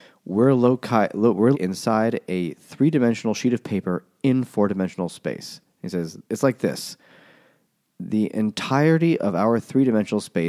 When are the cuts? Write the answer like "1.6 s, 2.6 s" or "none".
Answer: 1.5 s, 6.2 s